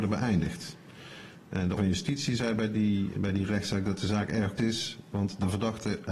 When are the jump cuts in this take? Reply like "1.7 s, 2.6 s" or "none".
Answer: 1.8 s, 3.1 s, 4.6 s